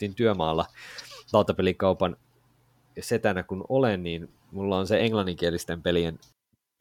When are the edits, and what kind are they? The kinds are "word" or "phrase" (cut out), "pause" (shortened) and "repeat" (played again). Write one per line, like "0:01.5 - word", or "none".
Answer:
none